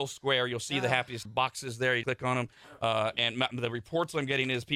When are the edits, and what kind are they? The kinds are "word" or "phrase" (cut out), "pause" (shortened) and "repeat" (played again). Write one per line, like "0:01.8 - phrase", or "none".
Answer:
0:01.2 - word
0:02.0 - word